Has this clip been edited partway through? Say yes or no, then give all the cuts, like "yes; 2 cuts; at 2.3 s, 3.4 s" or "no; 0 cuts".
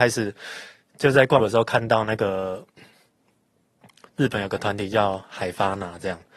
yes; 1 cut; at 1.4 s